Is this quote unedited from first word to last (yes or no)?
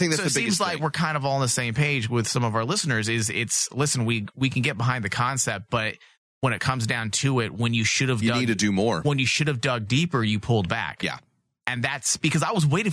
yes